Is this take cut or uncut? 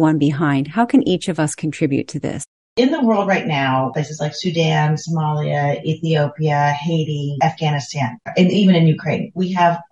uncut